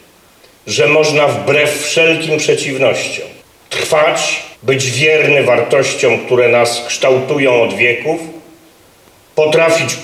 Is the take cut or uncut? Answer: cut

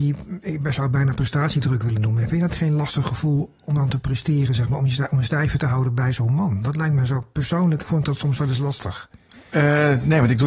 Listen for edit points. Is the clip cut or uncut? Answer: uncut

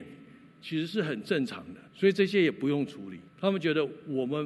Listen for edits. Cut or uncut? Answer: cut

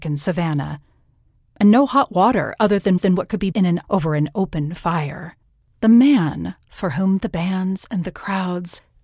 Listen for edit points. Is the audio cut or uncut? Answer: cut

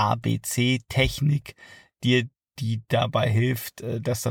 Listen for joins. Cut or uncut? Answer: uncut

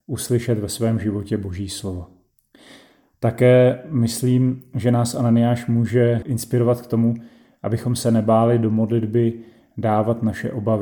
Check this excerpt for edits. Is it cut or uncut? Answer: cut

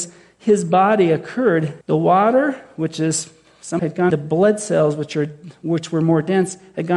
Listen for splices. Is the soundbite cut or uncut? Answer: cut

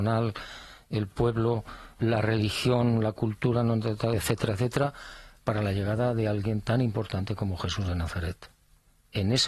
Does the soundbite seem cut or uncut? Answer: cut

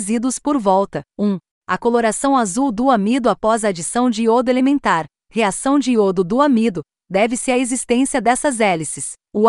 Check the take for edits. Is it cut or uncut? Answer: uncut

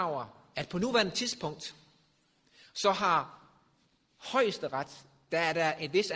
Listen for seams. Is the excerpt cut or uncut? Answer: uncut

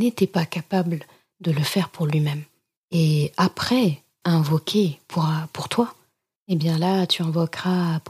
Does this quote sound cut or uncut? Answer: cut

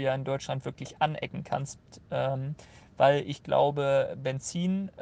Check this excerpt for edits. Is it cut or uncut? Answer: uncut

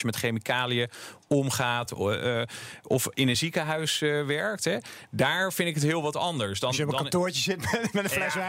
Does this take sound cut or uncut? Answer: uncut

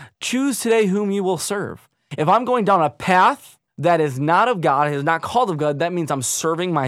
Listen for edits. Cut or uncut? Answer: cut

